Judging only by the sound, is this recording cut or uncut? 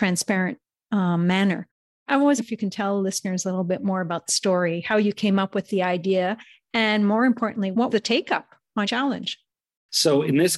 cut